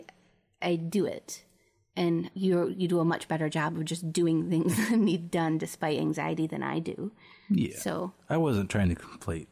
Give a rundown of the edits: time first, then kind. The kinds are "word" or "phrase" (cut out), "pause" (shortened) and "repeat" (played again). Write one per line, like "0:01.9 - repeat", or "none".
0:02.3 - word